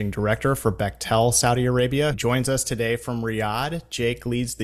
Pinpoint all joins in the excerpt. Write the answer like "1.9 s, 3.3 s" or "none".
2.1 s